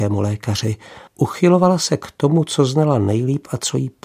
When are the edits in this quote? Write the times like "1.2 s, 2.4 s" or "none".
1.1 s